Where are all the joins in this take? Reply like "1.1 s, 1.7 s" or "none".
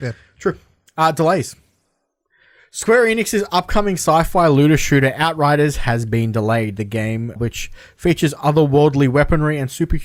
7.4 s

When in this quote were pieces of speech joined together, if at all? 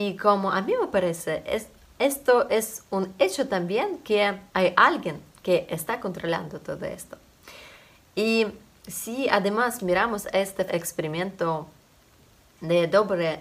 4.5 s, 10.7 s

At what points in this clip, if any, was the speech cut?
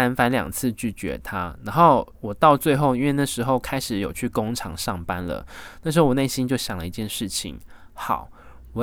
2.1 s

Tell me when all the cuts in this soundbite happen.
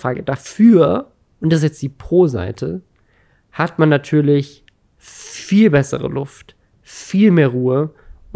none

